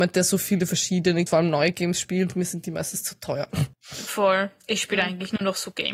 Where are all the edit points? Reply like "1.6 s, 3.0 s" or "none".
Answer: 1.3 s, 3.7 s